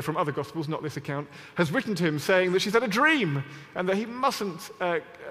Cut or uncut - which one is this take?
uncut